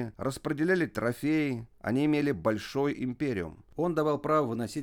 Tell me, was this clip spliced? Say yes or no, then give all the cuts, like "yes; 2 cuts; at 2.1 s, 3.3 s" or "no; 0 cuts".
no; 0 cuts